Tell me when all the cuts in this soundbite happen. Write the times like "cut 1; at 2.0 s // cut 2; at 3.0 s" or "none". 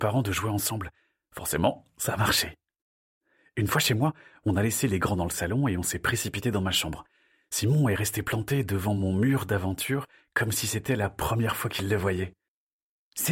none